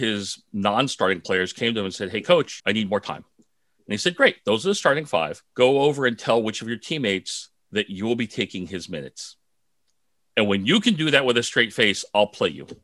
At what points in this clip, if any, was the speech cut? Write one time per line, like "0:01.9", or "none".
0:02.6
0:03.3
0:05.5
0:07.6